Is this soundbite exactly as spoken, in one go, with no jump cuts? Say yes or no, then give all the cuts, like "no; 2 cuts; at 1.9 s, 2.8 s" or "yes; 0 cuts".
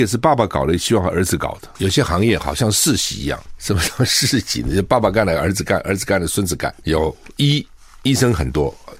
yes; 0 cuts